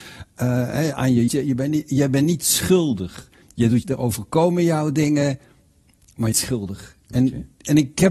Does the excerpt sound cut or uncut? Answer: cut